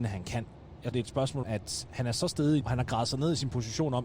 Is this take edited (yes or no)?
yes